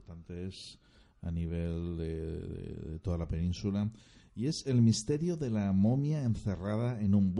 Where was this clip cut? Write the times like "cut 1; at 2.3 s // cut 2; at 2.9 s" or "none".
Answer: none